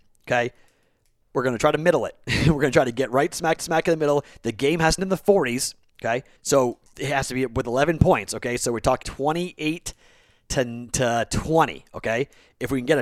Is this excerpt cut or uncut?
cut